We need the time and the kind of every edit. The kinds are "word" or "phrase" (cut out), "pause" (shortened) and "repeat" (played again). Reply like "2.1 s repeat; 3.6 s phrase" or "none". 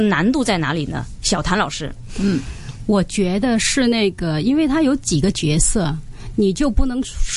none